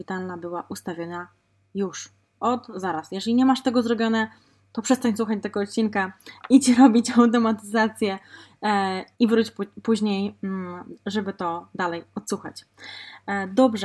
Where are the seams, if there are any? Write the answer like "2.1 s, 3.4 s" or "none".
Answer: 6.4 s, 9.1 s